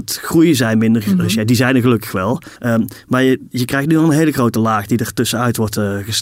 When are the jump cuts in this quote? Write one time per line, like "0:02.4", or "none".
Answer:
0:02.6